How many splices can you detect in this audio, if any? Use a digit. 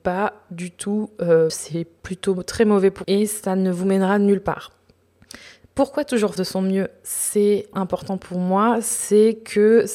4